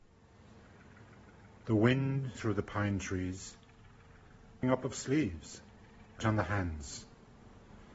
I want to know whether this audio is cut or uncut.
cut